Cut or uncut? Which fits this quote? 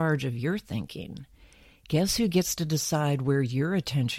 uncut